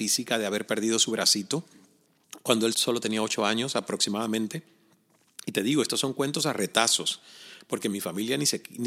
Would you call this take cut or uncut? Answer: cut